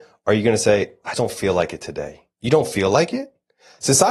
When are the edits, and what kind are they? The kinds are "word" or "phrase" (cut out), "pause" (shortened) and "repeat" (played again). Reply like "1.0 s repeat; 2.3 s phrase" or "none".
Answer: 1.1 s word; 2.3 s pause